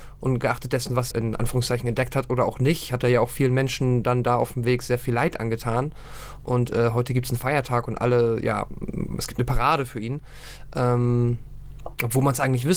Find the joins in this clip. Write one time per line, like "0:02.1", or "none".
0:01.1